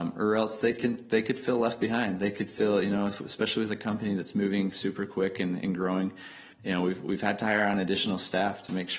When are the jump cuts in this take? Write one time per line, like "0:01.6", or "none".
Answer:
0:06.5